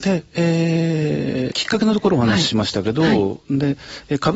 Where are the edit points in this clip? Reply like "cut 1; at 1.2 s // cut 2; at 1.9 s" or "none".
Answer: cut 1; at 1.5 s